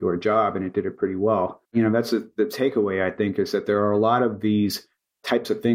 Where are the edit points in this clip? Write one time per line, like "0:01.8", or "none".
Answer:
0:01.7